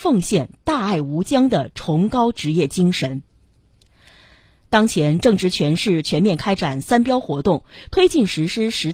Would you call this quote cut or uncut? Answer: uncut